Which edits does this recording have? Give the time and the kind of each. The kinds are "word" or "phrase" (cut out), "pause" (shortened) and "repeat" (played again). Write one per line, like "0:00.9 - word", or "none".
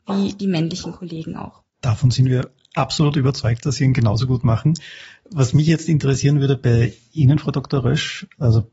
0:01.7 - pause